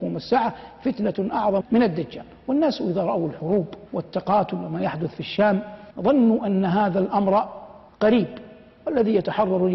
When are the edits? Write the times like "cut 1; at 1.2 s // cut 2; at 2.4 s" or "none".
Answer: cut 1; at 1.6 s // cut 2; at 3.9 s // cut 3; at 5.9 s // cut 4; at 7.9 s